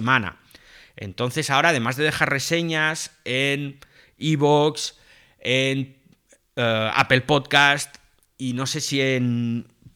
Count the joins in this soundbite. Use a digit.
0